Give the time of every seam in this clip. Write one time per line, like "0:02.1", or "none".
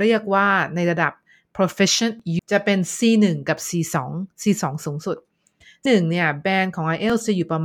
0:02.4
0:05.9